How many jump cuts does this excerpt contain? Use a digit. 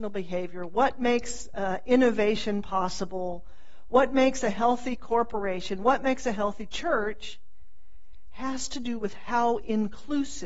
0